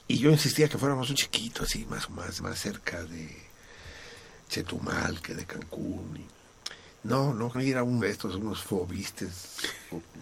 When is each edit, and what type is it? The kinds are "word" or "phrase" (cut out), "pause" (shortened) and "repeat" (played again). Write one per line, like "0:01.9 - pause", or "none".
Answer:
0:01.1 - word
0:02.1 - word
0:02.4 - word
0:07.5 - word
0:08.0 - word